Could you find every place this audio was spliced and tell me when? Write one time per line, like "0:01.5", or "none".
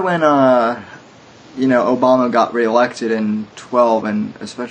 0:03.5

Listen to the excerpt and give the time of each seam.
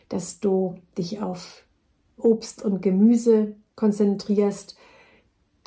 none

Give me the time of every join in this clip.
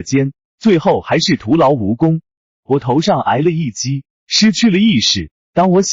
none

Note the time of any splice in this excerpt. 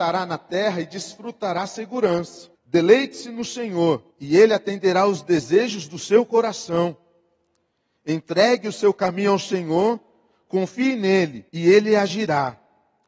0:02.5
0:04.1
0:11.5

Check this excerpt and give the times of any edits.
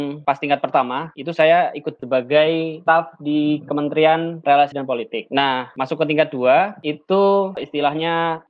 0:02.0
0:04.7
0:07.5

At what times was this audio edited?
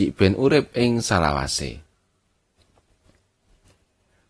none

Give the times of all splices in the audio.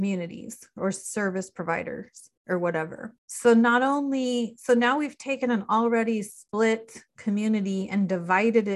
0:02.4
0:03.2
0:07.1

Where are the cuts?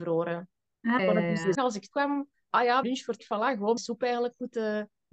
0:01.0
0:01.5
0:01.9
0:02.5
0:02.8
0:03.2
0:03.8

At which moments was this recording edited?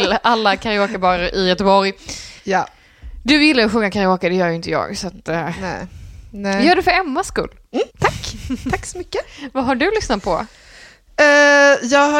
0:02.4
0:07.9

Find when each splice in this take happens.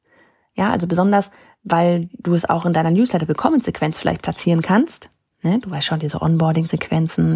none

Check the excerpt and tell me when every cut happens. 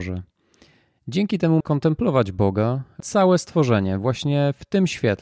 0:01.6
0:03.0

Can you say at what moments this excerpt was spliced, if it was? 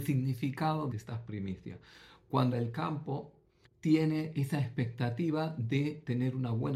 0:00.9
0:02.5
0:03.6

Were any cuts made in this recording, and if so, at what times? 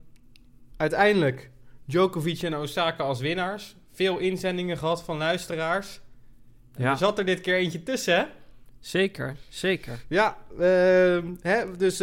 none

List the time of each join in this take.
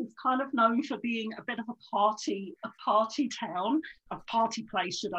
0:02.6
0:04.1

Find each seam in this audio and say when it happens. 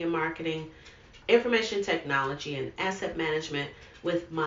none

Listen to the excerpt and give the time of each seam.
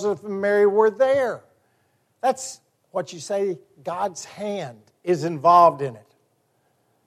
none

